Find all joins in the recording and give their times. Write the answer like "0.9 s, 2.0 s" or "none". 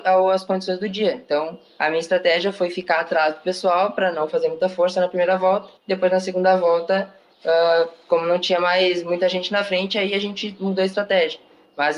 5.8 s